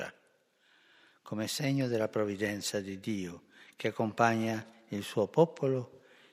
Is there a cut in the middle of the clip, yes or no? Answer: no